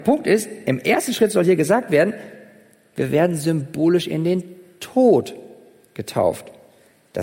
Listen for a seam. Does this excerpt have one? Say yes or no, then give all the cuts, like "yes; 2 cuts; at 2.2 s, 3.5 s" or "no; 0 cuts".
no; 0 cuts